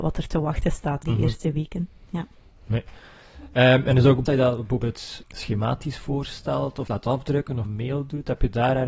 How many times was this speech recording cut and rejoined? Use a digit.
5